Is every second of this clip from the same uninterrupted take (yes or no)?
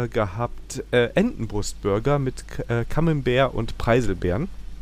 yes